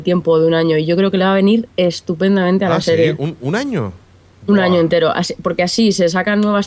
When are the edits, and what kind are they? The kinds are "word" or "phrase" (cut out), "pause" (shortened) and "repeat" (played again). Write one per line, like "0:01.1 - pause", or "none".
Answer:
none